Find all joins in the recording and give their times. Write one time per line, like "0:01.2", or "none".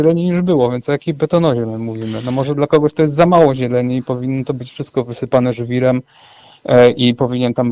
none